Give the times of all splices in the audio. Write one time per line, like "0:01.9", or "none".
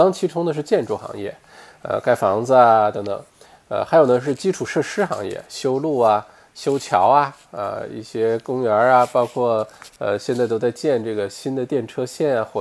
none